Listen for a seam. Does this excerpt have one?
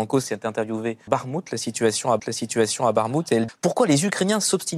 yes; 3 cuts; at 1.1 s, 2.2 s, 3.5 s

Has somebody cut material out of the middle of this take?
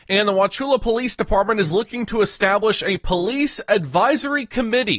no; 0 cuts

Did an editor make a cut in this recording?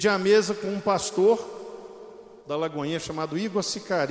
yes; 1 cut; at 2.4 s

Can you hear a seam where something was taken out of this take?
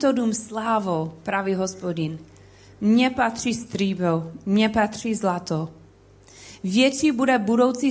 no; 0 cuts

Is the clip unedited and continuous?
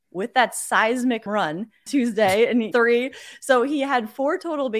no; 3 cuts; at 1.3 s, 1.9 s, 2.7 s

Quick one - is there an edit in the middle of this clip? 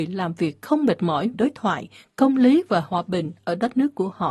yes; 1 cut; at 1.3 s

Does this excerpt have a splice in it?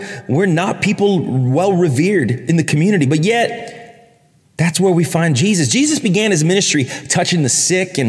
no; 0 cuts

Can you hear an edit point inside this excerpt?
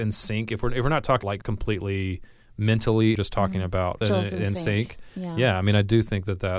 yes; 3 cuts; at 1.2 s, 3.1 s, 4.0 s

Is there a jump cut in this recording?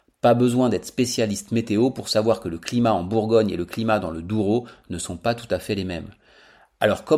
no; 0 cuts

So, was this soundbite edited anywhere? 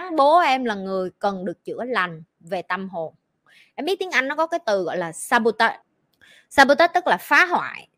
no; 0 cuts

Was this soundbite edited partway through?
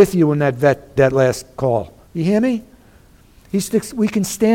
yes; 2 cuts; at 1.0 s, 2.1 s

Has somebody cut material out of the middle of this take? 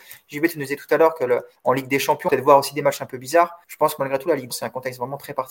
yes; 3 cuts; at 2.3 s, 3.6 s, 4.5 s

